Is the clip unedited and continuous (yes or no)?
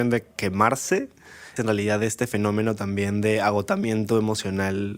no